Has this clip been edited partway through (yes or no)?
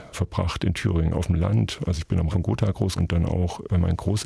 yes